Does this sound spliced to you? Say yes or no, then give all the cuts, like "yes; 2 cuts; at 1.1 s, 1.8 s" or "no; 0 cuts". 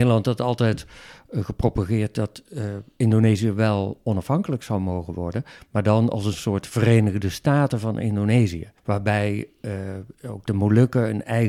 yes; 1 cut; at 8.8 s